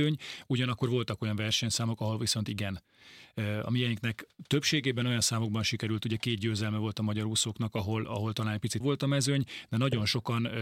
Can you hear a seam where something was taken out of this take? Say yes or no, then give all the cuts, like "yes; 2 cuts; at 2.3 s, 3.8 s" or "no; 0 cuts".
yes; 1 cut; at 8.8 s